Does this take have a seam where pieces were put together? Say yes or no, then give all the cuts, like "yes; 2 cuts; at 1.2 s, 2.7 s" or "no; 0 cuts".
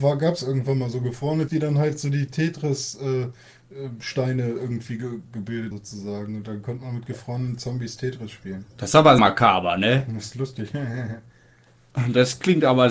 yes; 3 cuts; at 1.5 s, 5.7 s, 9.2 s